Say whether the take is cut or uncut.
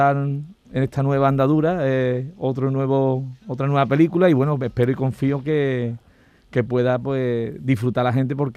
uncut